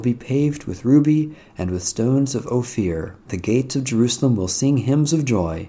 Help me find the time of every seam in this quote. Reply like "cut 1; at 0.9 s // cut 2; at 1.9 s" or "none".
cut 1; at 3.2 s